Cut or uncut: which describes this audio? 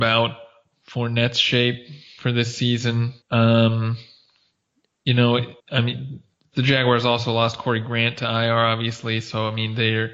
cut